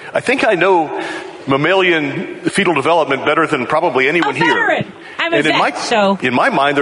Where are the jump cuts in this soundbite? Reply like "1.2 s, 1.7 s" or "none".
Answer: none

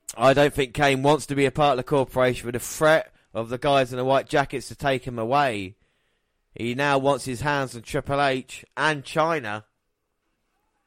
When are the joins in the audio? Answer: none

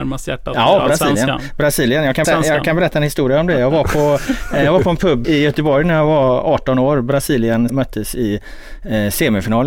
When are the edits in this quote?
2.2 s, 5.2 s, 7.7 s

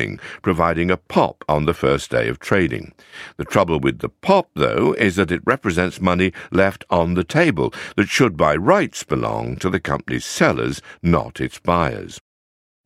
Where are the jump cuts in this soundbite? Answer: none

